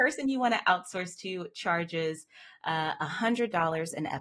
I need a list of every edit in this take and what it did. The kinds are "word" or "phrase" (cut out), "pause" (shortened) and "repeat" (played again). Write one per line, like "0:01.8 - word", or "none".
none